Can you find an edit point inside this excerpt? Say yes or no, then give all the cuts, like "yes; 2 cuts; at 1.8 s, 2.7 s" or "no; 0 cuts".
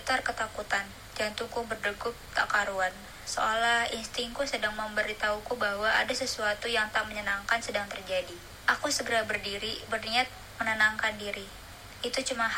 no; 0 cuts